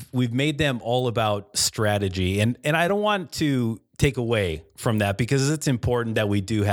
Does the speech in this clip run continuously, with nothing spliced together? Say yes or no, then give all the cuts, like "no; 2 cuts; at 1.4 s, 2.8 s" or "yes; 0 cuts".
no; 1 cut; at 2.9 s